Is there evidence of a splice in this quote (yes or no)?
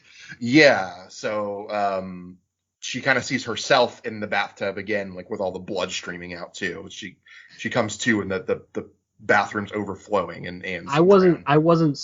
no